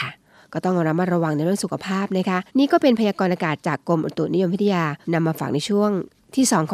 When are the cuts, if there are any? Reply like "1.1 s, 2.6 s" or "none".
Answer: 2.5 s, 5.0 s